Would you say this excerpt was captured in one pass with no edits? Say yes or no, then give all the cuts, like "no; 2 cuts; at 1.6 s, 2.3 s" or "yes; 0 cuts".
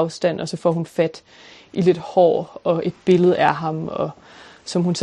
yes; 0 cuts